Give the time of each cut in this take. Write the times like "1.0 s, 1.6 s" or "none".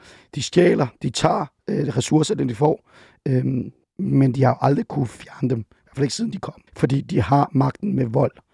3.8 s, 6.7 s